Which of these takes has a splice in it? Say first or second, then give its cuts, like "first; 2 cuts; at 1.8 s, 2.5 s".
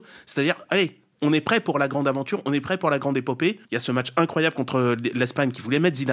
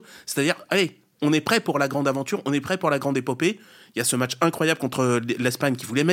first; 1 cut; at 3.6 s